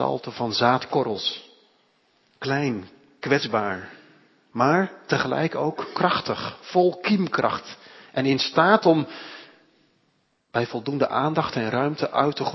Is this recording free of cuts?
yes; 0 cuts

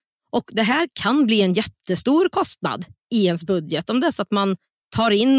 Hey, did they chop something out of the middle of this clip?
no; 0 cuts

